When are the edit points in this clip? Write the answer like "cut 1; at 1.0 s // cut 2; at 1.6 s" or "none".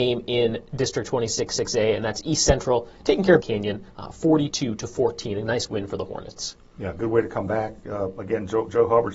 cut 1; at 3.4 s // cut 2; at 3.9 s